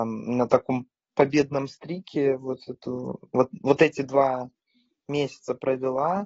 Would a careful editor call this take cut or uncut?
uncut